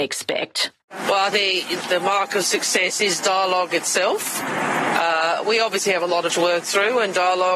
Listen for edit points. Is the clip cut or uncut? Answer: cut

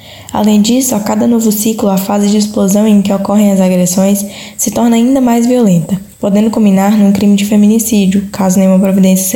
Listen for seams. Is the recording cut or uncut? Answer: cut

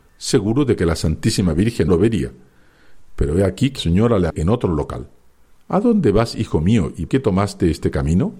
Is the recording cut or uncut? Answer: cut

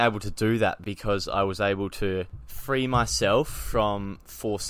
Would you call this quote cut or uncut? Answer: uncut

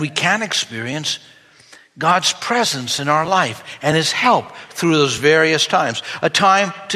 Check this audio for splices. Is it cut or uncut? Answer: uncut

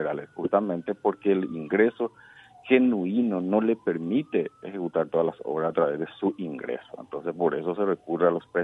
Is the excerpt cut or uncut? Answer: uncut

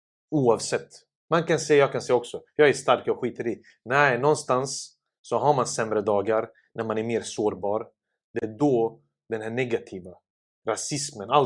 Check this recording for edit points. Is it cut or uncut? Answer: uncut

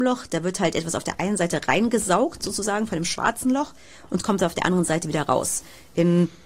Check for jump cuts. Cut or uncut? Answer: uncut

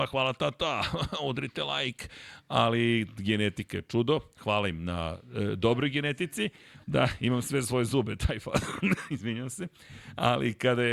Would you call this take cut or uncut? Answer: cut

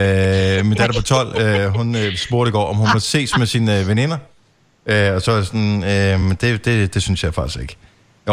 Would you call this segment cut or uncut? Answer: uncut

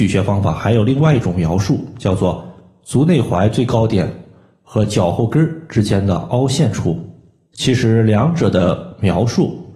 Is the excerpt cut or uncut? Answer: uncut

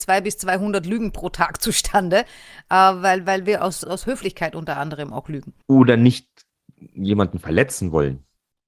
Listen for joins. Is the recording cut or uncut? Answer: cut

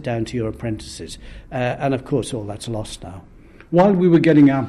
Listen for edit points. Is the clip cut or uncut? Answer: uncut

